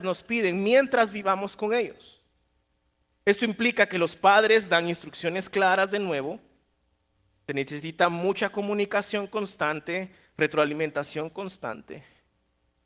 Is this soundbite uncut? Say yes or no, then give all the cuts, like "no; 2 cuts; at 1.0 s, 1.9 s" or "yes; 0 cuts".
yes; 0 cuts